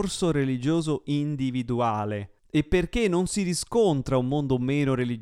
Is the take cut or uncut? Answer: uncut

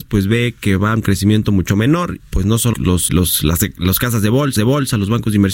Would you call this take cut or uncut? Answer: cut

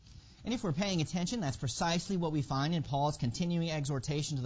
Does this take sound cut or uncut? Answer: uncut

